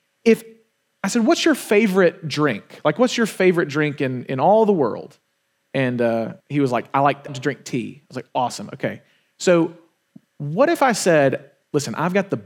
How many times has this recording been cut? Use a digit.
2